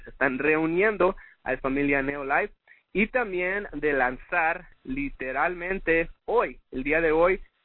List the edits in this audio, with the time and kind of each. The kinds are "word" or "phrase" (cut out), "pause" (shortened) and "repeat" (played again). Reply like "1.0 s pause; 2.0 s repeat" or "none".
1.6 s word; 3.7 s word